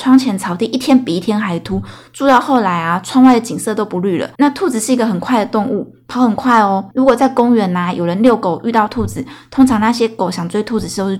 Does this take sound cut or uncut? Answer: cut